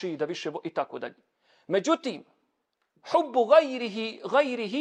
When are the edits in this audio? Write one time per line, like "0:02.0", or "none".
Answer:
0:02.6